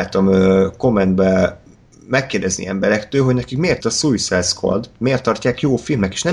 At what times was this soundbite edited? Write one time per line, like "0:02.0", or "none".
0:03.8